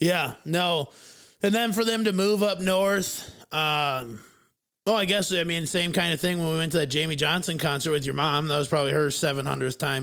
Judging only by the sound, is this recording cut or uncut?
uncut